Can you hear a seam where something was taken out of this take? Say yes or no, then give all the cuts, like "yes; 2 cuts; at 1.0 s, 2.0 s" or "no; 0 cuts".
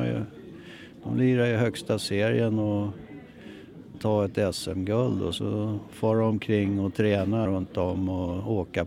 yes; 2 cuts; at 3.9 s, 7.5 s